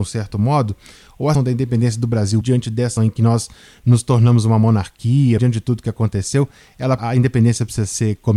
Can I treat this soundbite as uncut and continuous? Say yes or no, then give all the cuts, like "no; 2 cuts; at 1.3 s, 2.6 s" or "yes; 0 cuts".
no; 5 cuts; at 1.3 s, 2.4 s, 3.0 s, 5.4 s, 7.0 s